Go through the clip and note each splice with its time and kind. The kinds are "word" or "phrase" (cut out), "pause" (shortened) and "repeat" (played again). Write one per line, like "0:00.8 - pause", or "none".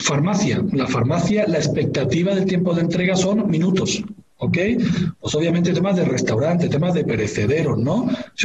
none